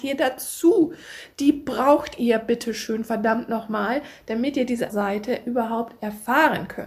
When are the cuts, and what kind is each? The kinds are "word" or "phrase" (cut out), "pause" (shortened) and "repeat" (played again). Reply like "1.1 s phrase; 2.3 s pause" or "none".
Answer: 4.9 s word